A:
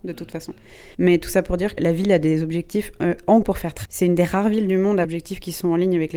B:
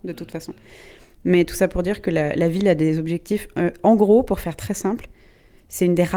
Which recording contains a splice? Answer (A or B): A